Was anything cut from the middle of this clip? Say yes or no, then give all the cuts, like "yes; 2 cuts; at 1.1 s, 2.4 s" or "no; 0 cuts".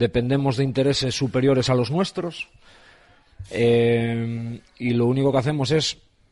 no; 0 cuts